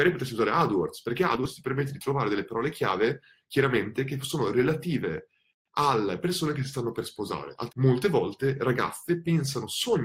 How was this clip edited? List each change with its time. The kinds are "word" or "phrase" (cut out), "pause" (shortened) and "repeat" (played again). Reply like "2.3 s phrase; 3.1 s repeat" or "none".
7.7 s phrase